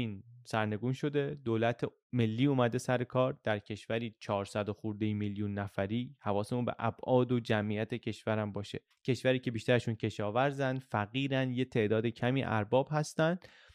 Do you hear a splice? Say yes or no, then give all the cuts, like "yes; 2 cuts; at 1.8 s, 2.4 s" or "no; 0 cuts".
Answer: yes; 1 cut; at 8.9 s